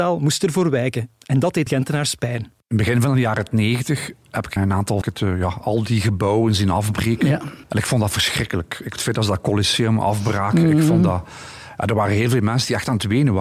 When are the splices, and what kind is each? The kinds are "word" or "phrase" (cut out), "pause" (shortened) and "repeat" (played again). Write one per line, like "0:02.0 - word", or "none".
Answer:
0:01.7 - word
0:02.6 - pause
0:04.6 - word
0:05.0 - phrase
0:07.6 - pause
0:08.9 - phrase